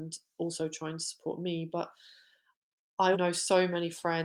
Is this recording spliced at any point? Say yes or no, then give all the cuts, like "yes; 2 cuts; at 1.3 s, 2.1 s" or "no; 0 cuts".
yes; 1 cut; at 3.1 s